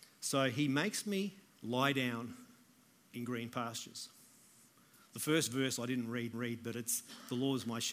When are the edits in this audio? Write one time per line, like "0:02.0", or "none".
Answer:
0:01.5
0:06.3